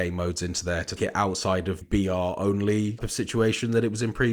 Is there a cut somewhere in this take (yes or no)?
yes